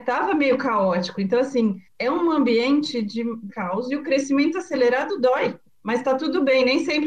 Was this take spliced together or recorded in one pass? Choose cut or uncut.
cut